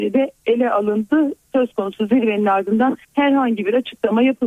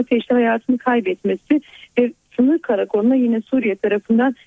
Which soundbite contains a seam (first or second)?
first